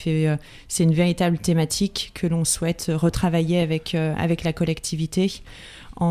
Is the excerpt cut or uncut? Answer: uncut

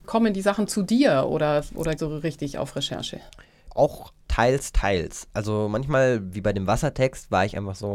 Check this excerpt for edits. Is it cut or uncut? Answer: cut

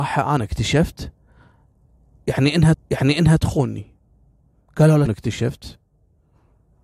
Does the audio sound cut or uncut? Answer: cut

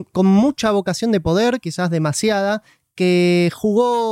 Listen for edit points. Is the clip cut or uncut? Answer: uncut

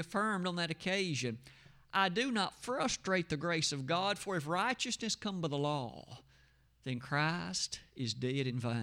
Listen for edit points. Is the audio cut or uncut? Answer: uncut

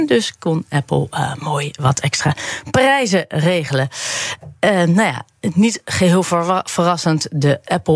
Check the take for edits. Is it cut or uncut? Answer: uncut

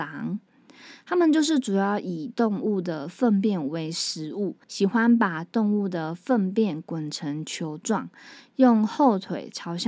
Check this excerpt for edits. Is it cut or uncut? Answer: cut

